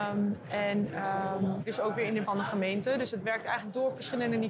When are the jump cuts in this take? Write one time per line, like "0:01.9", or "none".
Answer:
0:01.7
0:02.2